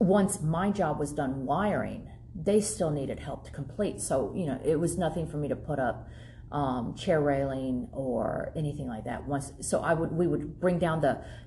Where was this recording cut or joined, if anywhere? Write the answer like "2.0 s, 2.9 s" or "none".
none